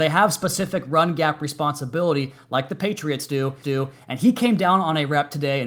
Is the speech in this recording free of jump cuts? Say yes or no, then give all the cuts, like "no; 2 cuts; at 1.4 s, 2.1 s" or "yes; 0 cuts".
no; 1 cut; at 3.6 s